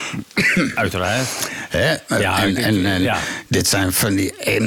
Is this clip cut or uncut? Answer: uncut